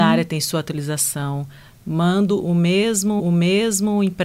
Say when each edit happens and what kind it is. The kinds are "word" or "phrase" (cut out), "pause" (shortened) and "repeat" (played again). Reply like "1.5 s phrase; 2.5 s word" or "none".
3.2 s repeat